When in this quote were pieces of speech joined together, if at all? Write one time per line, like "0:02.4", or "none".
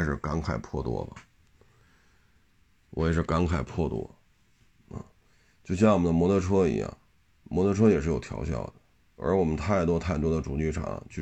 none